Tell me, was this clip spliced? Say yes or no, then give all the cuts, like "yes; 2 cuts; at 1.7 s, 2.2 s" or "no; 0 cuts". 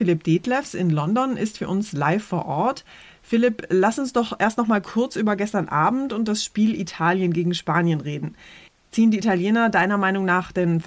no; 0 cuts